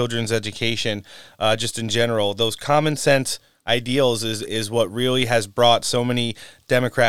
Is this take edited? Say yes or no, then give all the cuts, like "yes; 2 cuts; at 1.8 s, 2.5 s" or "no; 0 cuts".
no; 0 cuts